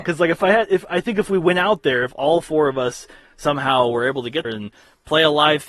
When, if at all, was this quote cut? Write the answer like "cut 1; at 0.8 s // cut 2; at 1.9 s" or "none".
cut 1; at 4.4 s